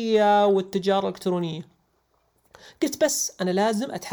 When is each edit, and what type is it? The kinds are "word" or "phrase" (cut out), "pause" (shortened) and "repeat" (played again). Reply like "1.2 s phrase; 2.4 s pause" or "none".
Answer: none